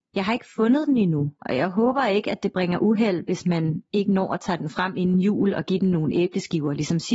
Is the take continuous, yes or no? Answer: no